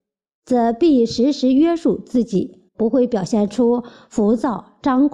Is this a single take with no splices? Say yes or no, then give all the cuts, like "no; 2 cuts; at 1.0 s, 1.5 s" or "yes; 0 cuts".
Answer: no; 1 cut; at 2.7 s